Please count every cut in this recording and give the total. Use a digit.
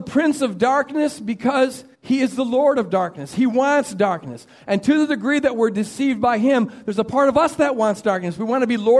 1